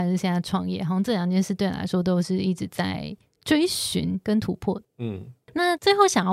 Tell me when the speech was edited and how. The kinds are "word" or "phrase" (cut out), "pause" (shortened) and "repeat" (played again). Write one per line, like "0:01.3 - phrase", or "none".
none